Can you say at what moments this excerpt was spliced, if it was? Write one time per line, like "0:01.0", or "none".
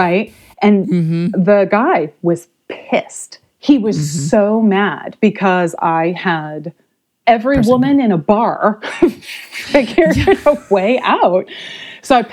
0:07.2